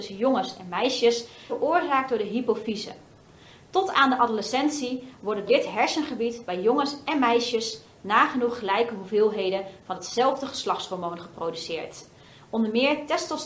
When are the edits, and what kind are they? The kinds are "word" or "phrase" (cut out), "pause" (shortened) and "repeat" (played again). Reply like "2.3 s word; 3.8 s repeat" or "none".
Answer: 1.5 s word; 5.5 s word